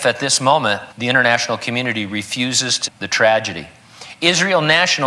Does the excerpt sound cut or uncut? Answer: cut